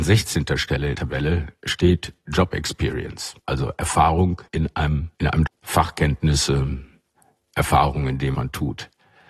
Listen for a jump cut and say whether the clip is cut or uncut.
cut